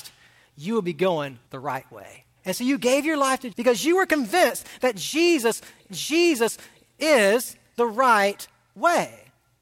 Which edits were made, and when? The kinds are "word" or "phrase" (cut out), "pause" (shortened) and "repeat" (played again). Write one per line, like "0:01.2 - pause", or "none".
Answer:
0:01.5 - pause
0:02.4 - pause
0:03.5 - word
0:05.9 - repeat

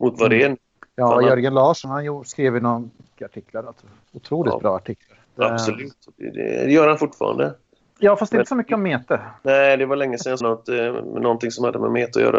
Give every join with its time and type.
0:01.8 - word
0:03.2 - word
0:05.2 - pause
0:09.4 - pause
0:10.4 - phrase

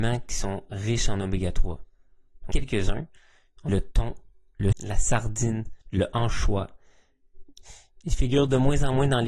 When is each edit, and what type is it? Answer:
0:02.5 - word
0:03.7 - word
0:04.7 - word
0:05.8 - pause

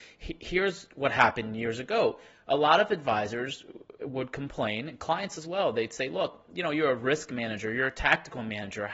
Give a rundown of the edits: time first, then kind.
none

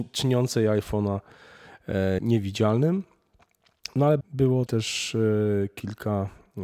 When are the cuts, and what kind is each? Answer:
0:02.2 - word
0:04.2 - word
0:04.7 - word

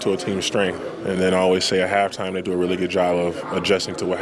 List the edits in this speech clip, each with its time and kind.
none

